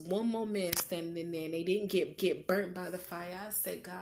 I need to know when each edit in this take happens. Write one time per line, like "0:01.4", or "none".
0:02.2